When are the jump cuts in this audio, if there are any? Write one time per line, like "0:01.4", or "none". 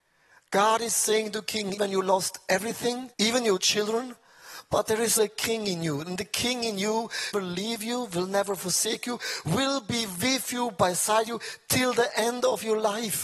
0:01.8
0:03.1
0:05.2
0:07.3